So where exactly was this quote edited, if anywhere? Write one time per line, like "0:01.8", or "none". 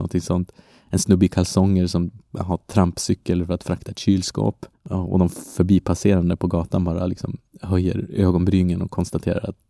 0:04.8
0:07.5